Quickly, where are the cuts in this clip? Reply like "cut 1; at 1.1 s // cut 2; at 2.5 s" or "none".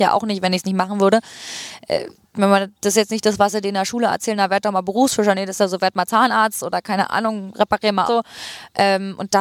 cut 1; at 8.1 s